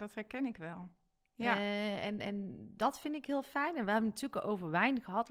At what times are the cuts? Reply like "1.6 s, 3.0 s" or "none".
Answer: none